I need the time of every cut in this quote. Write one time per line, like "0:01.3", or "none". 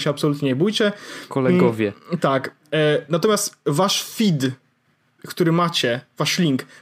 none